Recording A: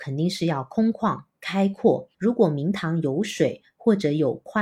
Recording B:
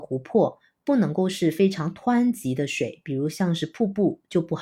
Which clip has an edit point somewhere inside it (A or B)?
A